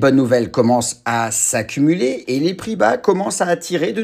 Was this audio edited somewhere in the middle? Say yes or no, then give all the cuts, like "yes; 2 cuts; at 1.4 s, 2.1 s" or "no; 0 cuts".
no; 0 cuts